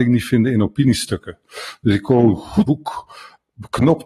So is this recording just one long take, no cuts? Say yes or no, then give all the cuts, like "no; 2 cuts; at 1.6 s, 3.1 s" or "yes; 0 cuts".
no; 1 cut; at 2.6 s